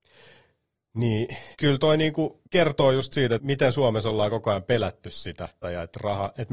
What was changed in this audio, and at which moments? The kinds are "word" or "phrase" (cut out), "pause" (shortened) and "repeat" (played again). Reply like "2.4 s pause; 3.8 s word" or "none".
1.5 s pause; 2.5 s pause; 3.4 s word; 5.6 s word

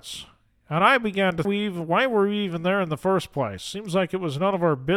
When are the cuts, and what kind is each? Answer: 1.4 s phrase

